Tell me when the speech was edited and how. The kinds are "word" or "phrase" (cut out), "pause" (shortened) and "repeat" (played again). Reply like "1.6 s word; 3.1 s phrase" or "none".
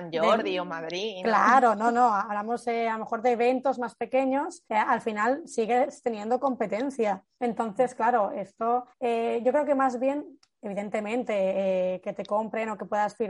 4.7 s pause; 7.3 s pause; 8.9 s pause